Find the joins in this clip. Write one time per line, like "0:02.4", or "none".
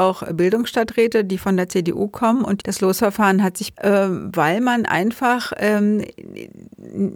0:02.6
0:03.7